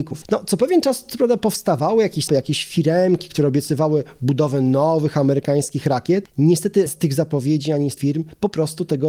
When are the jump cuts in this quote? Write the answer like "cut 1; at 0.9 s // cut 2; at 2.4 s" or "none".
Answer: cut 1; at 2.3 s // cut 2; at 6.9 s // cut 3; at 8.0 s